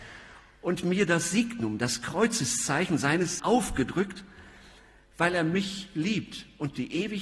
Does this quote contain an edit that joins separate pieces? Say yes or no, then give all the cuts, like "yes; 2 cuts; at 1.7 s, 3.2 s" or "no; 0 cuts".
yes; 1 cut; at 3.4 s